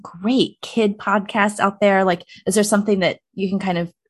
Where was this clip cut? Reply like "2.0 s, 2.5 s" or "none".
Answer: none